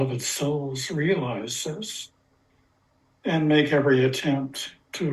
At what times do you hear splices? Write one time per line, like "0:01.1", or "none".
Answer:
none

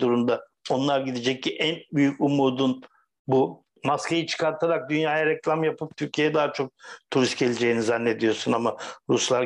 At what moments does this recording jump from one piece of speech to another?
none

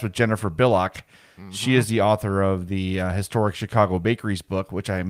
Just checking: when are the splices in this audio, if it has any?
none

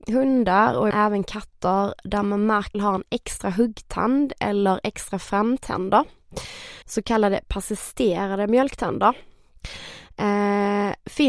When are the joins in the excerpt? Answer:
0:00.9
0:02.7
0:06.8

